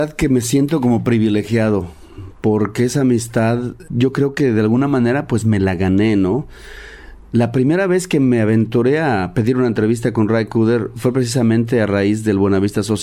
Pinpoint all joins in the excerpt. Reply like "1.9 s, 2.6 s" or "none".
3.9 s